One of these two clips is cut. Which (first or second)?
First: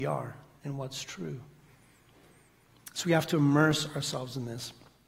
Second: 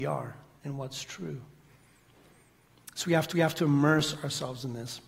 second